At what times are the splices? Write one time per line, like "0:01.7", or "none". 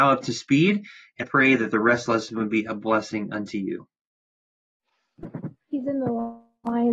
0:01.2
0:02.1